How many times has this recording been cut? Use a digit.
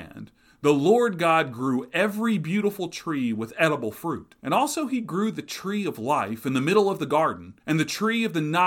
2